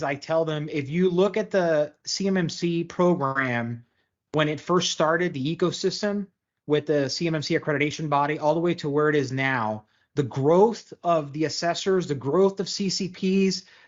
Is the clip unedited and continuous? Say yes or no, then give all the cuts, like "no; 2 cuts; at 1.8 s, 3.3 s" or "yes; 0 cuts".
yes; 0 cuts